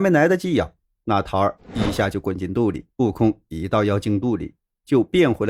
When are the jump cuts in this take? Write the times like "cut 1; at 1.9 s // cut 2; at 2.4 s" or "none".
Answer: cut 1; at 2.9 s